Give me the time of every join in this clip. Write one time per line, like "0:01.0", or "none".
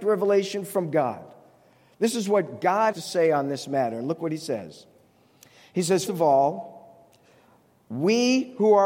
0:02.9
0:06.1